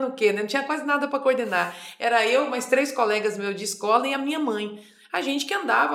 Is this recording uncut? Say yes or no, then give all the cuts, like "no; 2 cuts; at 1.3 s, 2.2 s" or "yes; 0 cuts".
yes; 0 cuts